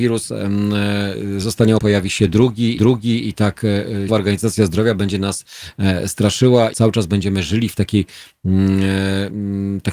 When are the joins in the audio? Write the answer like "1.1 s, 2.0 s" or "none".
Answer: 1.8 s, 2.8 s, 4.1 s, 6.7 s